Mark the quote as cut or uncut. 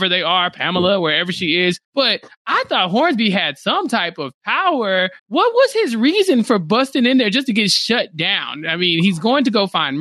cut